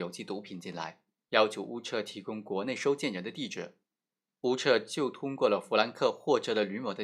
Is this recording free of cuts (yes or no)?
yes